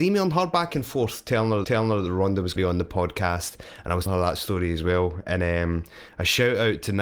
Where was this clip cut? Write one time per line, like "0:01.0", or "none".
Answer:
0:01.6
0:02.6
0:04.1